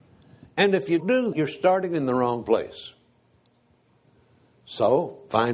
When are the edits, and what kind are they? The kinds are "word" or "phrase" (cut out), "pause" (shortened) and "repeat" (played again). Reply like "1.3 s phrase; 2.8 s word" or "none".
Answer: 1.0 s word; 1.3 s word

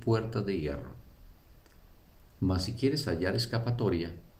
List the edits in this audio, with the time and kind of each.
none

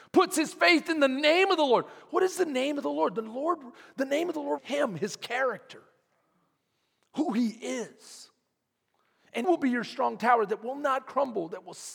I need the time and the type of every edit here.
4.6 s word; 9.4 s word

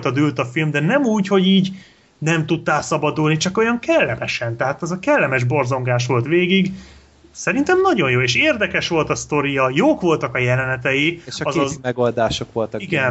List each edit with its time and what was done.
none

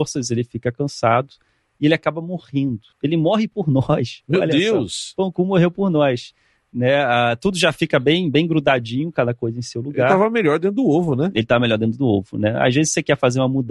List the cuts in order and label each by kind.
2.9 s pause

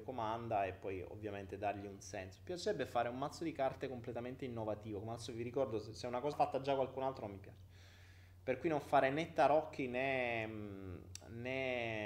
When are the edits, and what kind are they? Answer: 6.3 s word

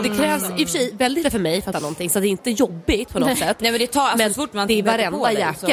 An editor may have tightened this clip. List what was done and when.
1.2 s word; 1.7 s word

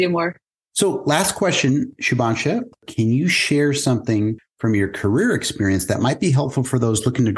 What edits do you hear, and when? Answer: none

